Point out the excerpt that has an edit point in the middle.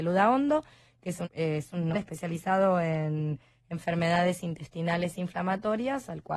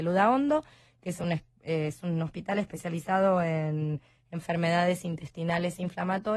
first; 2 cuts; at 1.2 s, 1.9 s

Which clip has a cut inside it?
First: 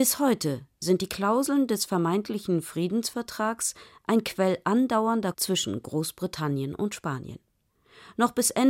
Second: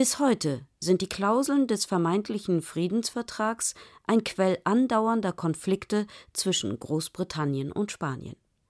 first; 1 cut; at 5.3 s

